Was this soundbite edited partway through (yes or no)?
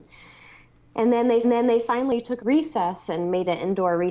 yes